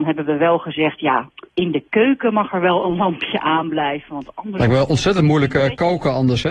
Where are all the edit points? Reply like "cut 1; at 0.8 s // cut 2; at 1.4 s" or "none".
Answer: cut 1; at 1.5 s